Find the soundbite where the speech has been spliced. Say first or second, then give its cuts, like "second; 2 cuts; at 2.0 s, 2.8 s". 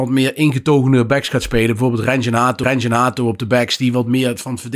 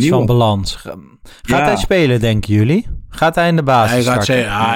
first; 1 cut; at 2.6 s